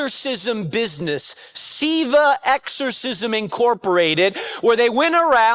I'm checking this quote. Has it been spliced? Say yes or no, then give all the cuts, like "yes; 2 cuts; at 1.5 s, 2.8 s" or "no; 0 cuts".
no; 0 cuts